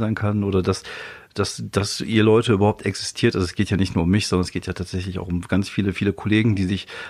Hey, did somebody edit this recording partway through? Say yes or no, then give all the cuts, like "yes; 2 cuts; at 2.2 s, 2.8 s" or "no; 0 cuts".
no; 0 cuts